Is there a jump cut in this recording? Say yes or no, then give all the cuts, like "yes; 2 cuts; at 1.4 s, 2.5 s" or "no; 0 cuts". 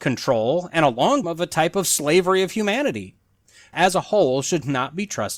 yes; 2 cuts; at 1.2 s, 3.7 s